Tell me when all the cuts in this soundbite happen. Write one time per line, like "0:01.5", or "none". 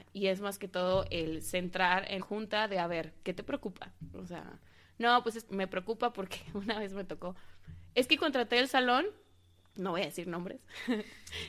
0:02.2
0:05.5